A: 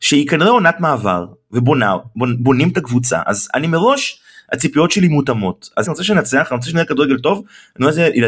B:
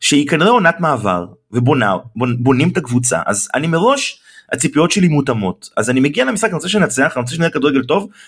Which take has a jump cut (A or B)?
A